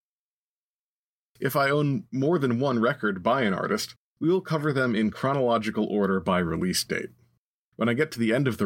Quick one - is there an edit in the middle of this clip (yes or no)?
no